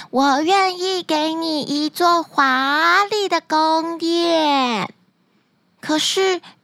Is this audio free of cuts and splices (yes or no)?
yes